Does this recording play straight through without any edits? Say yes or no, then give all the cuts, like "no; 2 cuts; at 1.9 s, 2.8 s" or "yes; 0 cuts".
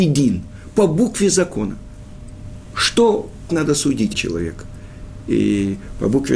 no; 2 cuts; at 3.5 s, 4.1 s